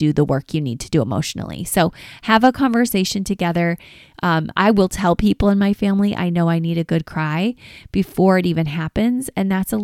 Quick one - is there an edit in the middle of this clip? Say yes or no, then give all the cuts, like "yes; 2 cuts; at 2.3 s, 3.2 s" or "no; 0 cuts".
no; 0 cuts